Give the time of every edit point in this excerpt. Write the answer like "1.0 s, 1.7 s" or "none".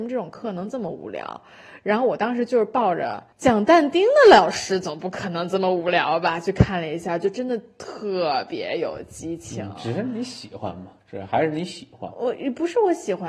3.3 s